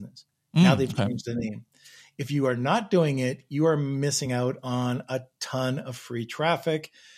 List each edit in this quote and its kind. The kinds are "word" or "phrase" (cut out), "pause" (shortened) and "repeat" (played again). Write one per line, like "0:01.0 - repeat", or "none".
none